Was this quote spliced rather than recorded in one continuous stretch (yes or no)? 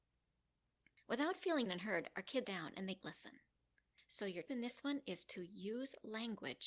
yes